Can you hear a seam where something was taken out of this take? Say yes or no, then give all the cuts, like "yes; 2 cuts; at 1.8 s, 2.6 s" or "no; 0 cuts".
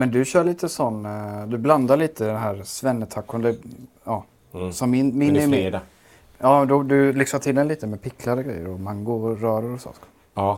no; 0 cuts